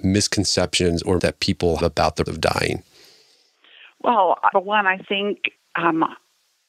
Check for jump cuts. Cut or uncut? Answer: cut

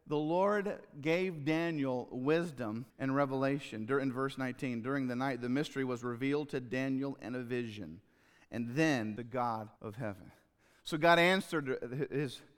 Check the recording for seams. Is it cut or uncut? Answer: cut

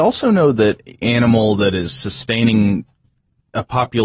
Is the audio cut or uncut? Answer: cut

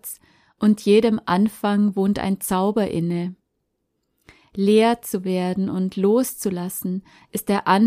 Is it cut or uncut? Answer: uncut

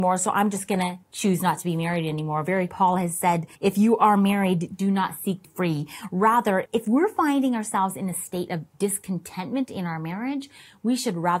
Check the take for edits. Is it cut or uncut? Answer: cut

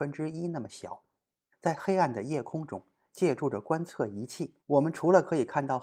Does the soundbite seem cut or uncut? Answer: cut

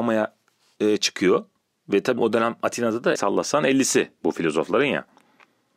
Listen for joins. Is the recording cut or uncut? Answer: cut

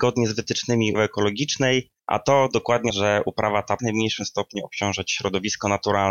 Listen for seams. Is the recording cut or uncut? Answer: cut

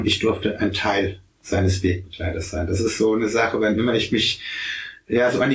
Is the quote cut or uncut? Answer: cut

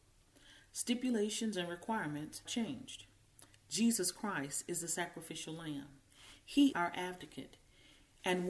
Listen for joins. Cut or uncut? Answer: cut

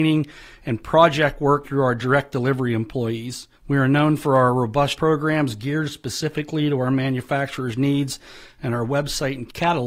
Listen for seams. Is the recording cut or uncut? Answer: cut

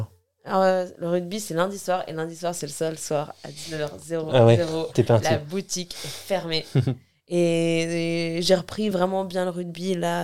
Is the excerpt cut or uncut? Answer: uncut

